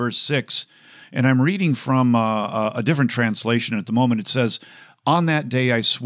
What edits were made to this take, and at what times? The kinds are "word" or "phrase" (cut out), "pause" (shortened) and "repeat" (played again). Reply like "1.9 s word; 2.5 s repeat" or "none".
none